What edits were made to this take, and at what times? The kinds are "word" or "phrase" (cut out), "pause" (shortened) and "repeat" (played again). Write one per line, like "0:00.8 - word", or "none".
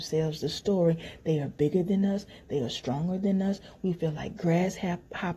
none